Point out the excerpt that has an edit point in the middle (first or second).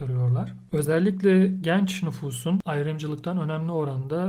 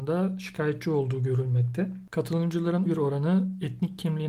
second